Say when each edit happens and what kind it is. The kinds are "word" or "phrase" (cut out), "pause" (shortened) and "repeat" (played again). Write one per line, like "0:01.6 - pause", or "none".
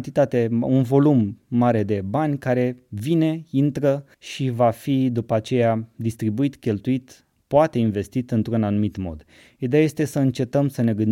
0:04.1 - pause